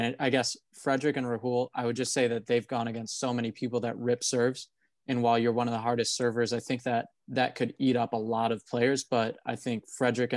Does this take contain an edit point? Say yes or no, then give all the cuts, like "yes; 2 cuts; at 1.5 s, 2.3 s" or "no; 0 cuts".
yes; 1 cut; at 7.1 s